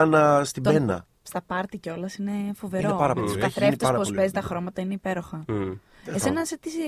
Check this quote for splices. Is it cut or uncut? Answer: cut